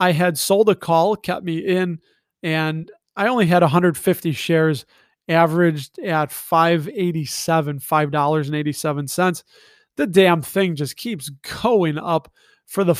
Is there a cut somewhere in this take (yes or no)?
no